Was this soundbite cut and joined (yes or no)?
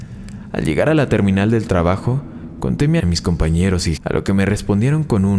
yes